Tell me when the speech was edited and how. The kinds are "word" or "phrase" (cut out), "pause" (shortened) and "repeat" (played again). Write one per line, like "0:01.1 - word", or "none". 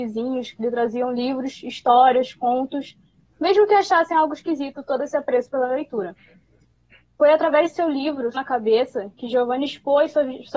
0:08.3 - word